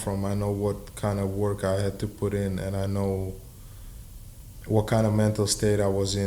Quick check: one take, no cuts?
yes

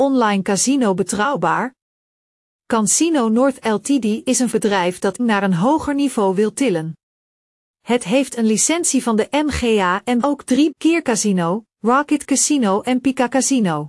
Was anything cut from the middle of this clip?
yes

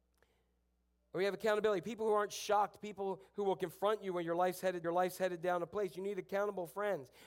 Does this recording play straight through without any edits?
no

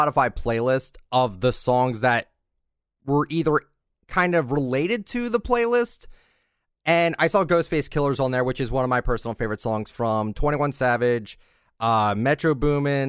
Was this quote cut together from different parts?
no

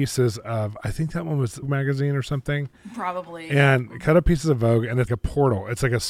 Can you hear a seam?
yes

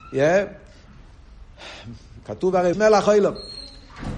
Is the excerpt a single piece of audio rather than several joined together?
no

